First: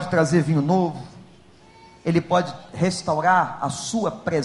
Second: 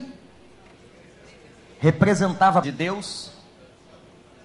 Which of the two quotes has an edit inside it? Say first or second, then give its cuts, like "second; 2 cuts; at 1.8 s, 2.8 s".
second; 1 cut; at 2.6 s